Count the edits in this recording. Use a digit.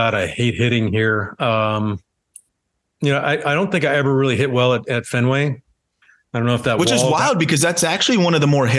0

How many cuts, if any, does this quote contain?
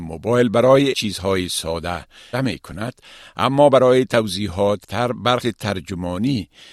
4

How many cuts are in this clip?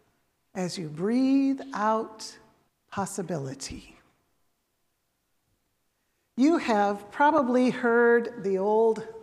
1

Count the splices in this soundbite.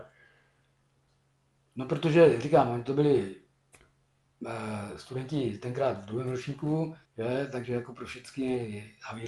1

